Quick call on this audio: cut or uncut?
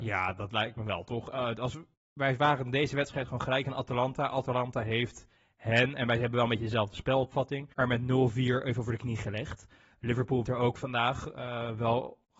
cut